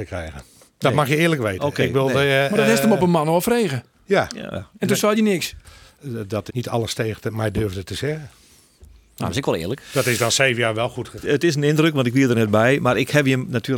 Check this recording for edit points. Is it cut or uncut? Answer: cut